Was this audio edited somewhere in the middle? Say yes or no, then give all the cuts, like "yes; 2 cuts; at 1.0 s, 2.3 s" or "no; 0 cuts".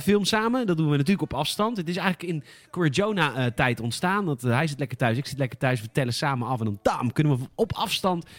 no; 0 cuts